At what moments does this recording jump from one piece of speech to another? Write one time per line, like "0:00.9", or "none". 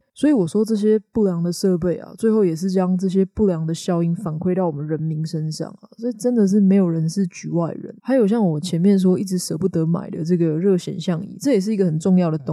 0:08.0